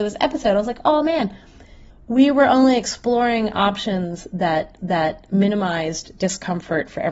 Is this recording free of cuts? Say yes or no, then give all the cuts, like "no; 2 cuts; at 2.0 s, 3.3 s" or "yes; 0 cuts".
no; 2 cuts; at 1.9 s, 4.8 s